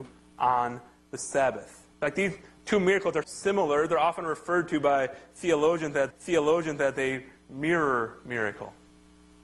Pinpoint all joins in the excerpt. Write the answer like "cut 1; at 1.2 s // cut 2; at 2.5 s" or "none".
cut 1; at 1.9 s // cut 2; at 3.2 s // cut 3; at 6.1 s